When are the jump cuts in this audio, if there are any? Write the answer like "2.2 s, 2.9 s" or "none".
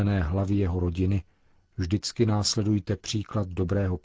none